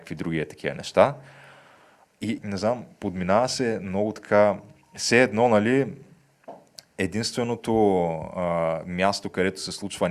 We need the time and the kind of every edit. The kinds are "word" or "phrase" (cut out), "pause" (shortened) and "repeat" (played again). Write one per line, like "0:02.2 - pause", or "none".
0:02.4 - word